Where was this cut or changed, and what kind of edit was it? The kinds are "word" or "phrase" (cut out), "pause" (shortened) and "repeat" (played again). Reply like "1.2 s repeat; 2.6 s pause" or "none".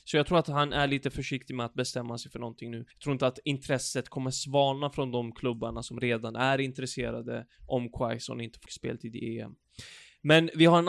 2.9 s pause; 8.7 s word